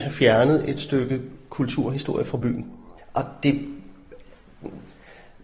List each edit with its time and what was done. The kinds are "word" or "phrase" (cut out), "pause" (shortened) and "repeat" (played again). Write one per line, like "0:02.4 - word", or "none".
none